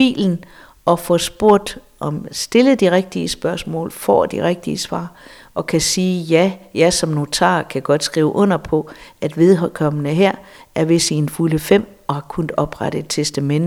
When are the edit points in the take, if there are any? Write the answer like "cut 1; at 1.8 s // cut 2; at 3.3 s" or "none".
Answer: none